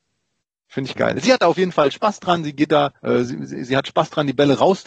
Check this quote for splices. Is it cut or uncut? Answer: cut